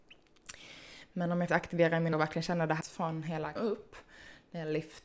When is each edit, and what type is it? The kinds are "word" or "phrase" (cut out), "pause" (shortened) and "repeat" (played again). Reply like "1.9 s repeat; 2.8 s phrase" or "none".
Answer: 1.5 s word; 2.1 s word; 2.8 s word; 3.6 s word